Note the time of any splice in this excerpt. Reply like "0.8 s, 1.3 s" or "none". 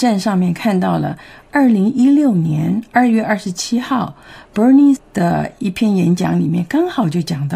5.0 s